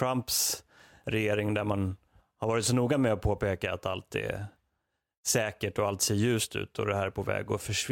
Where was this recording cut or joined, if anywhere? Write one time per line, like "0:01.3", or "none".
none